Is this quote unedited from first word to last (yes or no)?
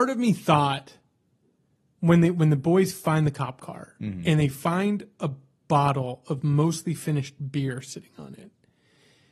yes